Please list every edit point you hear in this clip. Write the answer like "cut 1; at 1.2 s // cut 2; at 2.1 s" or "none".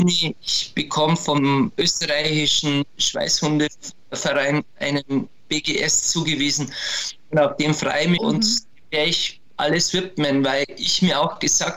cut 1; at 8.2 s